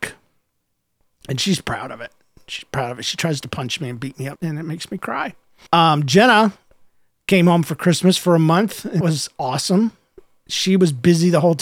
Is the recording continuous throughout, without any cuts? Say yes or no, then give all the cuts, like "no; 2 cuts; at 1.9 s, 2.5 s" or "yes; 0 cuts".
no; 2 cuts; at 4.3 s, 9.0 s